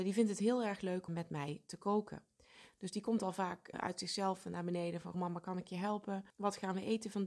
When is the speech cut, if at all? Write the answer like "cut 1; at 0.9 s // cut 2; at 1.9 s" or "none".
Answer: cut 1; at 1.1 s // cut 2; at 3.7 s // cut 3; at 5.1 s // cut 4; at 6.3 s